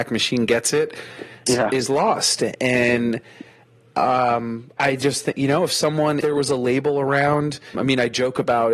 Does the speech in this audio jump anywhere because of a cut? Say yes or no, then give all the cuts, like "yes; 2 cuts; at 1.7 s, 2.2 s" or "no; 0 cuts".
yes; 4 cuts; at 1.5 s, 4.8 s, 6.2 s, 7.7 s